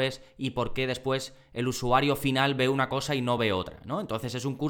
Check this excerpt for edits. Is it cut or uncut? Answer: uncut